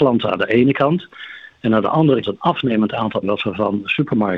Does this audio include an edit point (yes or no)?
yes